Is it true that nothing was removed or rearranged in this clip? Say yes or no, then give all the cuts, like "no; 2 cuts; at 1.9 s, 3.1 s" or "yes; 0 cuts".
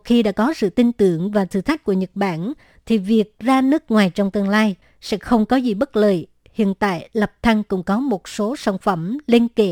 yes; 0 cuts